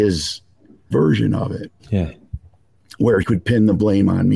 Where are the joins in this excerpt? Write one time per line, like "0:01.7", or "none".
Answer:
0:00.9
0:01.8
0:03.2